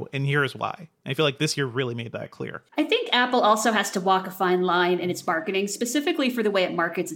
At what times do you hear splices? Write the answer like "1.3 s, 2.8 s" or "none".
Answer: 2.7 s

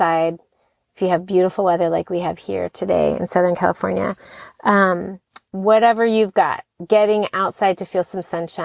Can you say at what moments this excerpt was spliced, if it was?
5.5 s

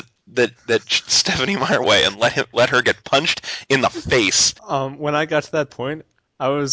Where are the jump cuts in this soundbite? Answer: 1.8 s, 4.6 s

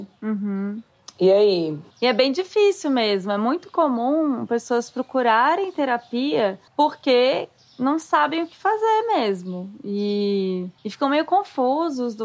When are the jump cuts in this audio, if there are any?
1.9 s, 6.7 s, 10.8 s

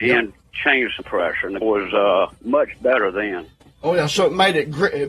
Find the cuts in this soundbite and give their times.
1.0 s, 1.6 s, 2.4 s, 3.6 s

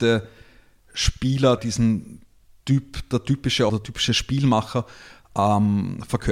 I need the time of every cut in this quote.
1.6 s, 2.4 s, 3.7 s

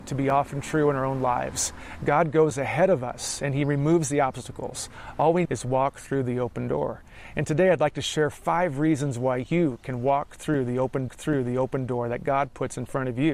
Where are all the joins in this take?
5.4 s, 11.1 s

